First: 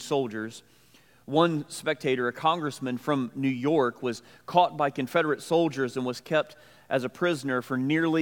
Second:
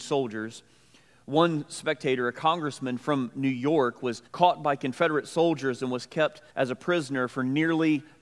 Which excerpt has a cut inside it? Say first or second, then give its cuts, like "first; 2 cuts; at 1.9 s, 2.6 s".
second; 2 cuts; at 4.3 s, 6.5 s